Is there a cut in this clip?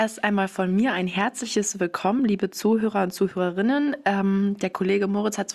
no; 0 cuts

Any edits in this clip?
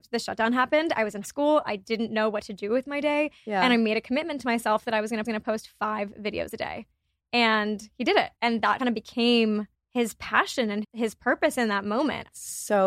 yes; 6 cuts; at 1.2 s, 5.2 s, 8.4 s, 8.8 s, 9.7 s, 10.8 s

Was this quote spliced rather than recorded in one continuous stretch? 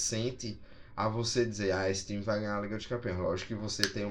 no; 0 cuts

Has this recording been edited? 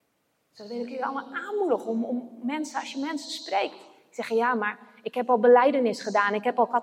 no; 0 cuts

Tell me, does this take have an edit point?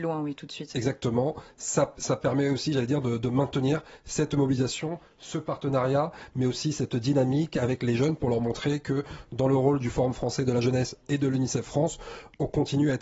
no; 0 cuts

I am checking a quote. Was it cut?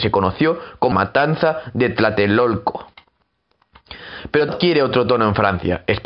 yes; 2 cuts; at 0.9 s, 4.5 s

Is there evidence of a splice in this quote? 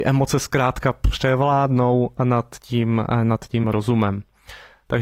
yes; 1 cut; at 3.6 s

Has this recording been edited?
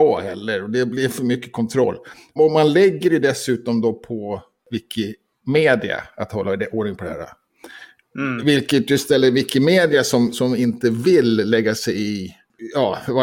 no; 0 cuts

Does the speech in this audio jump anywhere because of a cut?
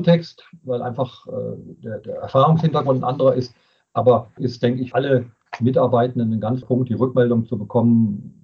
yes; 3 cuts; at 4.4 s, 4.9 s, 6.6 s

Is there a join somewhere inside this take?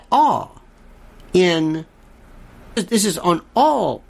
yes; 1 cut; at 2.8 s

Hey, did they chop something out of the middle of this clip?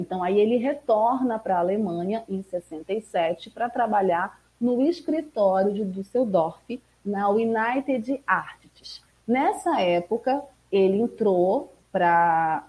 no; 0 cuts

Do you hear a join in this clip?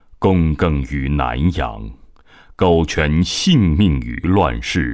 no; 0 cuts

